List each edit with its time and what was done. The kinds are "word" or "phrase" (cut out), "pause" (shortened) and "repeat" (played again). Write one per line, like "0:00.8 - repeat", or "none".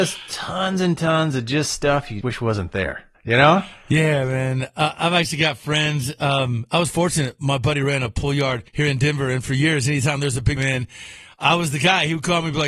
0:02.2 - word
0:03.1 - pause
0:08.7 - pause
0:10.6 - phrase